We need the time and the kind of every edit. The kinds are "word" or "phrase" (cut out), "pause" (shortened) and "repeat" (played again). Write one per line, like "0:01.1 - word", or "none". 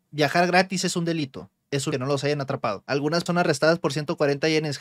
0:01.9 - phrase
0:03.3 - word